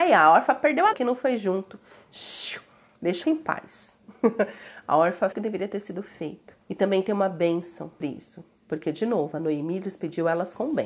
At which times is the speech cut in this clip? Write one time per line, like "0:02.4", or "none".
0:00.9
0:03.2
0:05.3
0:06.6
0:08.0